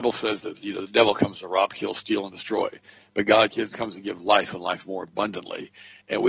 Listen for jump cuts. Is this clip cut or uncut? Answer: uncut